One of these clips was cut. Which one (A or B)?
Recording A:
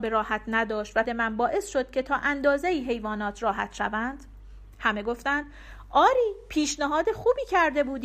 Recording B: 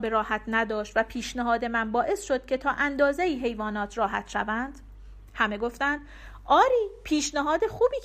A